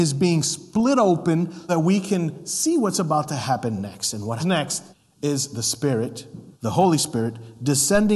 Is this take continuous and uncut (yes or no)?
no